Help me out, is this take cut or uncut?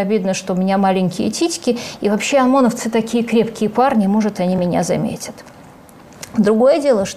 uncut